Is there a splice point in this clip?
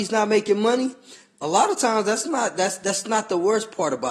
no; 0 cuts

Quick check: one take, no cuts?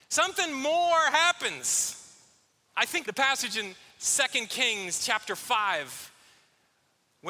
no; 2 cuts; at 2.5 s, 3.0 s

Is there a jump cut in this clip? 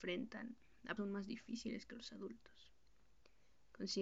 yes; 1 cut; at 1.0 s

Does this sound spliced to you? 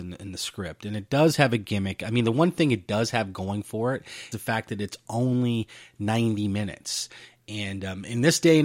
yes; 1 cut; at 4.3 s

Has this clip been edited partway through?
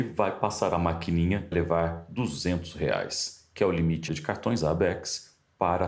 yes; 2 cuts; at 1.5 s, 4.1 s

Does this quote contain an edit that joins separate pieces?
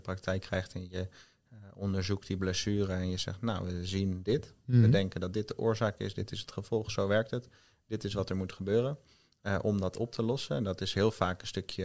no; 0 cuts

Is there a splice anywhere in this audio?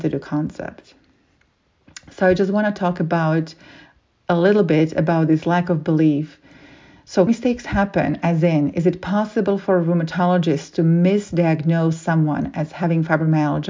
yes; 1 cut; at 7.3 s

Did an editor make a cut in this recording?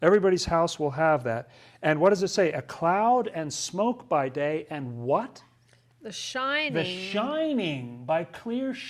no; 0 cuts

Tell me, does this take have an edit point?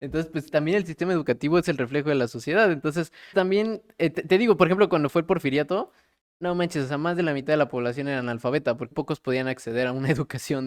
yes; 2 cuts; at 3.3 s, 8.9 s

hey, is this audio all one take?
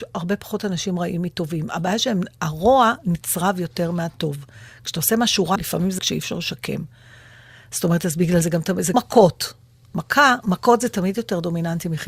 no; 4 cuts; at 5.6 s, 6.0 s, 8.4 s, 8.9 s

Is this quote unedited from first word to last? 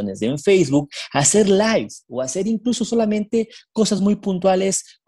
yes; 0 cuts

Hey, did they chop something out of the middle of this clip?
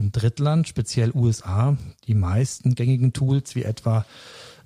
no; 0 cuts

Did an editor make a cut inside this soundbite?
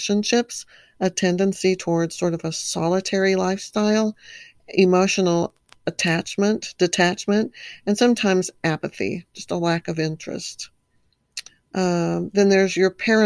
no; 0 cuts

